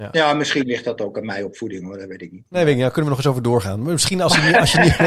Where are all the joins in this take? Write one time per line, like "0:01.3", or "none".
none